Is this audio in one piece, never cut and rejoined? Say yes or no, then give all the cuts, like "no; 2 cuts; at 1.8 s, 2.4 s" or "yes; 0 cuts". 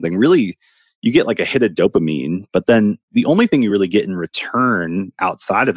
yes; 0 cuts